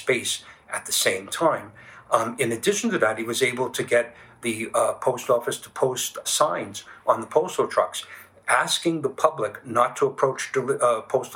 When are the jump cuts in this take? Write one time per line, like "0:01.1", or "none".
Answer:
0:06.2

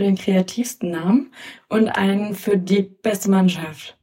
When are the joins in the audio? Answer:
none

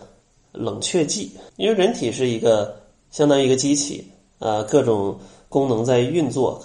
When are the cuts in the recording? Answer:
0:01.5

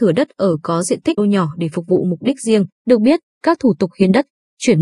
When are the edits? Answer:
0:01.2
0:02.7

